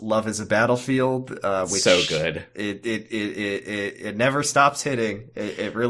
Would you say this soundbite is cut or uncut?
uncut